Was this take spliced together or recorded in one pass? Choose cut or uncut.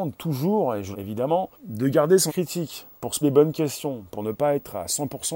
cut